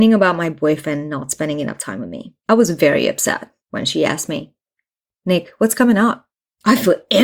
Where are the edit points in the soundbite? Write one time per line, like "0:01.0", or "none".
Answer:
0:02.4
0:03.6